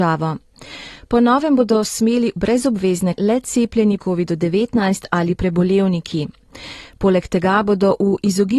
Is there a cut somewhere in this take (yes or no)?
yes